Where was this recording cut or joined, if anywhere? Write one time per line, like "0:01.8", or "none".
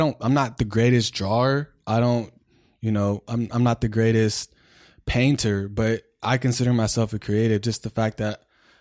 none